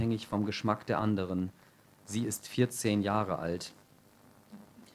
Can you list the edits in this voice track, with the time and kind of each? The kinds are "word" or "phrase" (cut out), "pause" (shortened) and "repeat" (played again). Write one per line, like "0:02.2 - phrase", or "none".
none